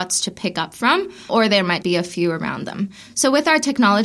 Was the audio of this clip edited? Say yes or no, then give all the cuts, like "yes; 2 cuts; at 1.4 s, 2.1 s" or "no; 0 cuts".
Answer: yes; 2 cuts; at 1.3 s, 1.8 s